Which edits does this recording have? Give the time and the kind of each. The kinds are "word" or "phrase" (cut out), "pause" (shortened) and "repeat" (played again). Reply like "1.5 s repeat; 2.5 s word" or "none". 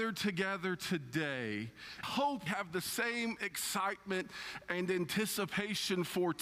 2.0 s phrase; 2.5 s word

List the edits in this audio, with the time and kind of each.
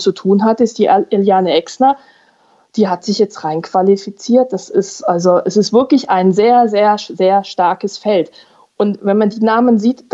none

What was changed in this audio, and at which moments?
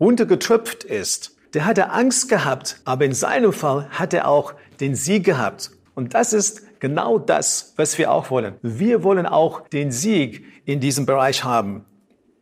1.4 s pause; 2.8 s pause; 5.9 s pause; 8.6 s pause; 9.7 s pause

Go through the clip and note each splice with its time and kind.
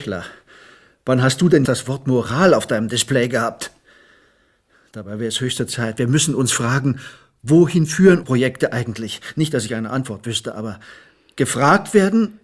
1.6 s word; 8.2 s word

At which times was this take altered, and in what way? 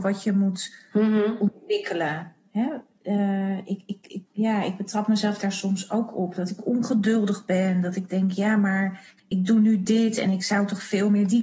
4.3 s pause; 9.2 s pause

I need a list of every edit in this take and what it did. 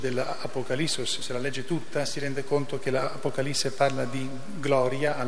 1.2 s word

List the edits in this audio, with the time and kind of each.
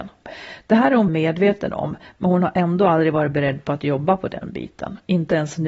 1.1 s word

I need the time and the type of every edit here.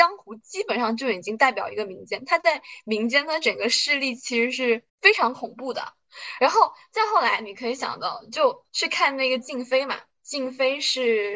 4.9 s pause; 8.7 s pause

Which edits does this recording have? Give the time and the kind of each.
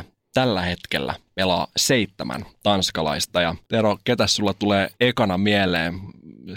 3.6 s pause; 5.0 s pause

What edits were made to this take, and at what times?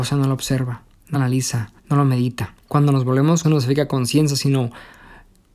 1.1 s word; 1.8 s pause; 2.6 s pause; 3.4 s phrase

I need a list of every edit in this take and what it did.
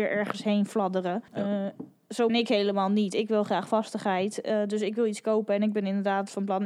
1.3 s pause; 2.3 s word

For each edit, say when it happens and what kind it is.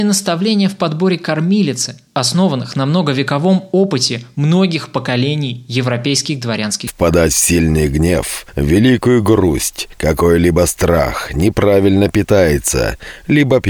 2.1 s pause; 6.9 s phrase

